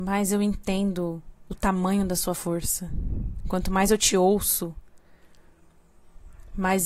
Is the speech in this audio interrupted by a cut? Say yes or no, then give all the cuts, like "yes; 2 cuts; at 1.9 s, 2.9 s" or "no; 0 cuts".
no; 0 cuts